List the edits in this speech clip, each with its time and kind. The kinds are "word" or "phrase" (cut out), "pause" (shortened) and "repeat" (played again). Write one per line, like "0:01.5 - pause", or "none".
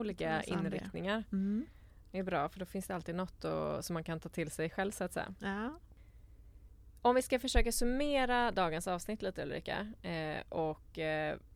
none

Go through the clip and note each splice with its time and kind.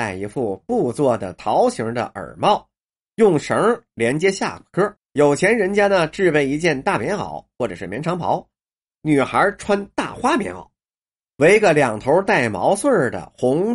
0:05.0 - pause

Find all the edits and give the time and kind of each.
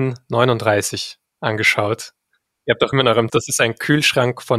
0:02.9 - word
0:03.3 - word

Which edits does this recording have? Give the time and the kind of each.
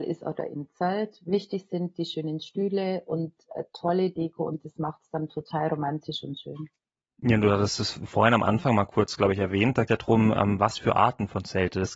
0:04.1 - phrase
0:09.9 - phrase

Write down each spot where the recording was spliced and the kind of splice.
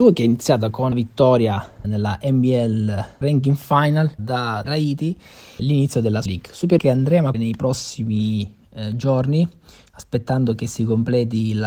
0:00.9 - word
0:01.8 - word
0:03.2 - word
0:04.2 - word
0:04.6 - word
0:05.6 - word
0:06.3 - word
0:06.8 - word
0:07.3 - word

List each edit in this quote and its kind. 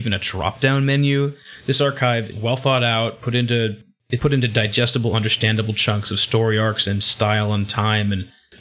0:02.3 - word
0:04.2 - word

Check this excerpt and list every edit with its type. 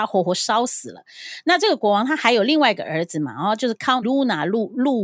0:04.0 - word

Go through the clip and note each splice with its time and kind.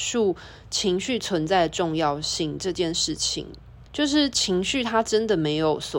0:03.9 - pause

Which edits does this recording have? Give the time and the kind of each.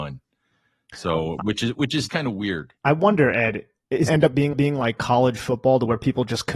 0:02.1 - word
0:02.8 - pause
0:04.1 - phrase
0:04.5 - repeat

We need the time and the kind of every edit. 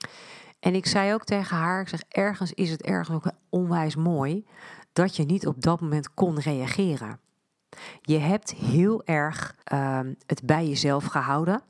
0:09.6 - pause

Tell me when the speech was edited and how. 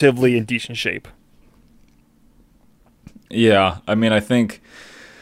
none

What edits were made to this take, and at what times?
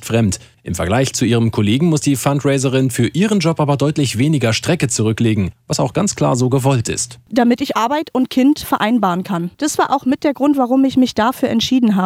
none

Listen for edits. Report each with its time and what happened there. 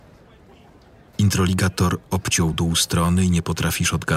none

